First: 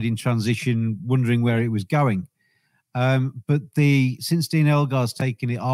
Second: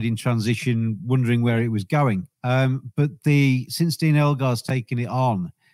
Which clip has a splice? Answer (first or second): second